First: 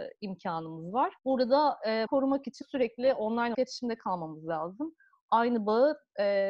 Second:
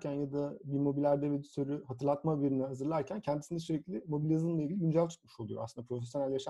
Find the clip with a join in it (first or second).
first